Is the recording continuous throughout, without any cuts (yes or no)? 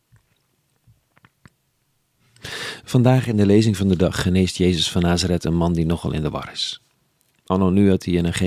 yes